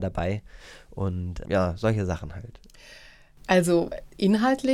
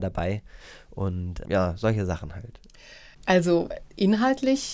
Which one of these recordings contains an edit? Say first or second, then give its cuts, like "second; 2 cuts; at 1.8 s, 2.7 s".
second; 1 cut; at 3.1 s